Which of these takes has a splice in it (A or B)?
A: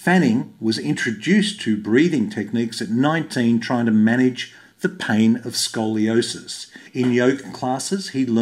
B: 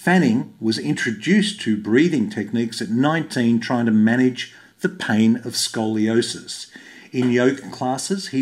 A